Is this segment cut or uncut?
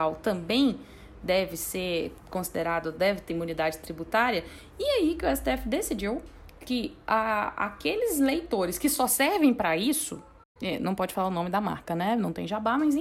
cut